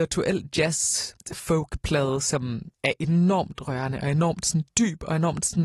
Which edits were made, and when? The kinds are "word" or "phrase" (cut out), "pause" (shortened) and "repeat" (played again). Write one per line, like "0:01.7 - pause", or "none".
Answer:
0:01.2 - pause
0:02.7 - pause